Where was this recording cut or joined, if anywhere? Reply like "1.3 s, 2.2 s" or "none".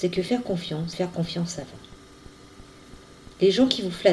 0.9 s